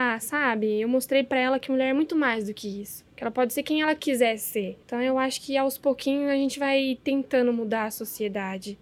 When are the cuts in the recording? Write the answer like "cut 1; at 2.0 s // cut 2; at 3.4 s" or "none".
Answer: cut 1; at 3.1 s // cut 2; at 4.8 s